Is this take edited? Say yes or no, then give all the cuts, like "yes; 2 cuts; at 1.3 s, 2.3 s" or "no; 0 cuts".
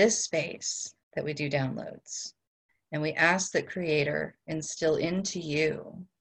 yes; 2 cuts; at 1.0 s, 2.7 s